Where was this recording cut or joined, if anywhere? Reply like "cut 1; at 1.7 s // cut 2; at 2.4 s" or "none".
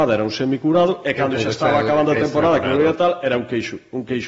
none